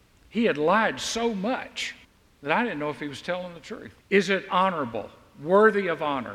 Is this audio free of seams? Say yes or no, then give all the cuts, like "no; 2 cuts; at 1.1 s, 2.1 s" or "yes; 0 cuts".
no; 2 cuts; at 2.0 s, 4.0 s